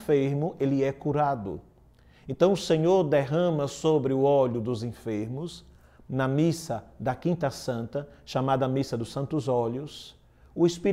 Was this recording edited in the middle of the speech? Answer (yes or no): no